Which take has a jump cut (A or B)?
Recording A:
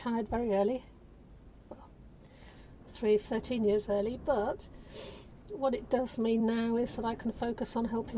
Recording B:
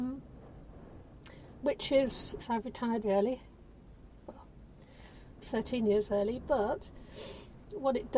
B